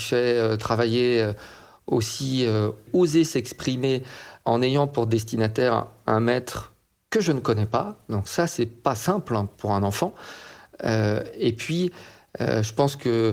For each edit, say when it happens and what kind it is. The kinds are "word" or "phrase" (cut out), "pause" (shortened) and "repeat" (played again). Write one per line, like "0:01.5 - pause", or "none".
none